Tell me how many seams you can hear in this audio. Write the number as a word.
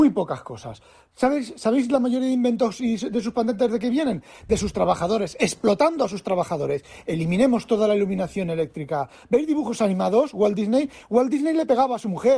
zero